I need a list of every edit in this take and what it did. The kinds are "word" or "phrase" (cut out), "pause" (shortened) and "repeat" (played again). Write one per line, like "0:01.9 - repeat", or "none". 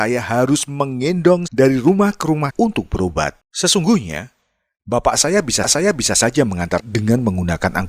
0:01.5 - word
0:02.5 - word
0:03.4 - pause
0:05.6 - repeat
0:06.8 - phrase